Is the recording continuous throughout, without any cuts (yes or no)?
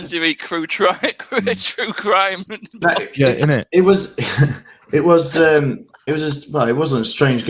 yes